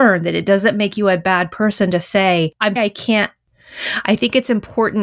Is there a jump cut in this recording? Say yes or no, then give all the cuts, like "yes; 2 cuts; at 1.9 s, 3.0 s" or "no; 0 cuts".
yes; 1 cut; at 2.8 s